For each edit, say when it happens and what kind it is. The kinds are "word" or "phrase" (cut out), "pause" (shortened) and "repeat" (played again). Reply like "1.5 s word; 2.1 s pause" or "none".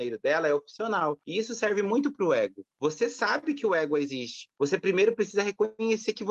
none